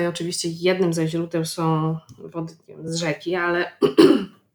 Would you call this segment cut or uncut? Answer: uncut